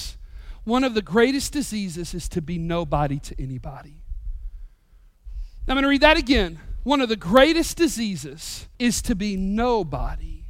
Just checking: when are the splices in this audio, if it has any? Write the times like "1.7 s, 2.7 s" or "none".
8.7 s